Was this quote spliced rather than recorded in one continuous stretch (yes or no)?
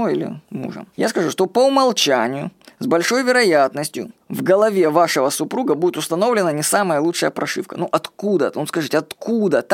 yes